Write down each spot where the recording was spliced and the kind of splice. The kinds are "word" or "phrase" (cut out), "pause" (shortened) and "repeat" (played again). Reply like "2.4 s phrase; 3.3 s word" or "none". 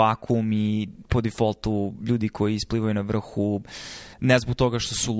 4.1 s pause